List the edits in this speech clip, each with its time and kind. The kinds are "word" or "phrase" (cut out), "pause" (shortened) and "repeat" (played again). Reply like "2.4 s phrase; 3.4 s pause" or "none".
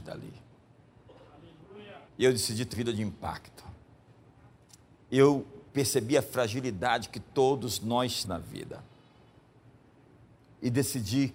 2.1 s pause; 2.7 s word; 5.7 s pause; 8.2 s word